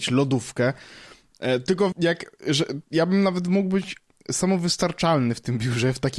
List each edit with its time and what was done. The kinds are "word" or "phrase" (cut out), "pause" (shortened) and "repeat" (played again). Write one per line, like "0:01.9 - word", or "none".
0:01.9 - word